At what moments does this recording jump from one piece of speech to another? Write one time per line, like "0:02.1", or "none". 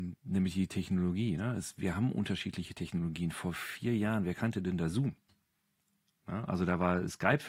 none